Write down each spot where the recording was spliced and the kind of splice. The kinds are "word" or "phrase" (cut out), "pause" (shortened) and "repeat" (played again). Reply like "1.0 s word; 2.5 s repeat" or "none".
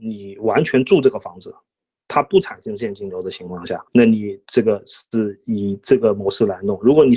3.9 s pause